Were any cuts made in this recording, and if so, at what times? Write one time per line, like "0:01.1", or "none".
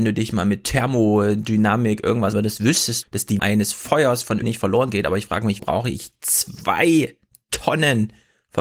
0:02.3
0:03.0
0:03.4
0:04.4
0:05.6